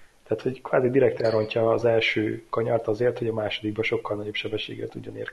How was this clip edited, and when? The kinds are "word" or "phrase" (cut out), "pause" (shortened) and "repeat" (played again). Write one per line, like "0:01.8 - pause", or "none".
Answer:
none